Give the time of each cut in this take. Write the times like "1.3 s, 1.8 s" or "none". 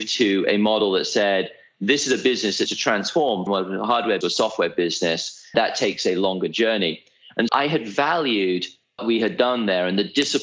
2.7 s, 3.5 s, 4.2 s, 5.5 s, 7.5 s, 9.0 s